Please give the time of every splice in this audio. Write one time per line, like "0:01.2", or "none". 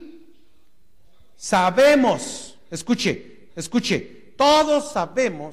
0:03.5